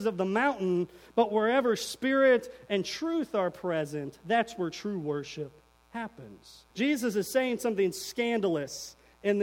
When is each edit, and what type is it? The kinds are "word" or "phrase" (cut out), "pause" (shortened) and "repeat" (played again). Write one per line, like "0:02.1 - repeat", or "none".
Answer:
0:06.7 - pause